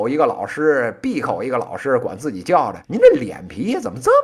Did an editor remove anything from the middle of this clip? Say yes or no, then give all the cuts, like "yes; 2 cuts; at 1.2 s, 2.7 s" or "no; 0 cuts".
yes; 1 cut; at 2.8 s